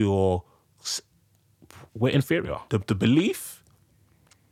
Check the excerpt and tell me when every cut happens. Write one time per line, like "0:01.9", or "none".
0:01.9
0:02.7